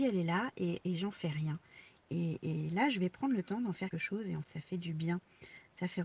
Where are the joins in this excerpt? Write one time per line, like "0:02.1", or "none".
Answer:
0:03.9
0:04.4